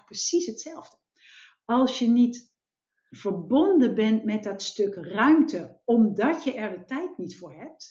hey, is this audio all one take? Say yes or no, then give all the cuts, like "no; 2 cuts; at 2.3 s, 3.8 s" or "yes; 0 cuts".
yes; 0 cuts